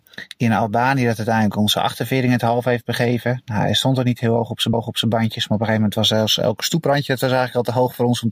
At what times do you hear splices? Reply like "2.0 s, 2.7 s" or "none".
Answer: 4.7 s